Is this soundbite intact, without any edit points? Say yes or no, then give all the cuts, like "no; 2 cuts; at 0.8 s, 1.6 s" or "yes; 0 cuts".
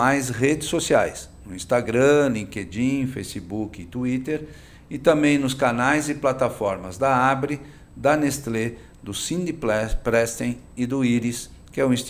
yes; 0 cuts